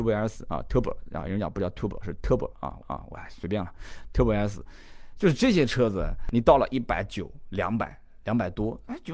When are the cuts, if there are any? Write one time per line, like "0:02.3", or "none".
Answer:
0:02.8

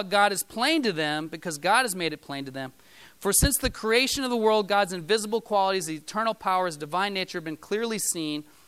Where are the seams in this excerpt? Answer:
none

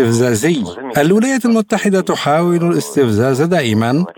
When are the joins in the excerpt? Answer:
none

